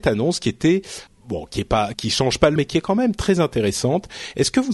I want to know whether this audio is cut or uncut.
cut